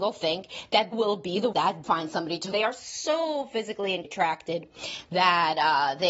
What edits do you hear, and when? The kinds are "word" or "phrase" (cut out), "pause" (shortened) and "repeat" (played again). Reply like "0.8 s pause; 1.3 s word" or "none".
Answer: 0.9 s word; 1.5 s word; 1.8 s word; 2.5 s word; 4.0 s word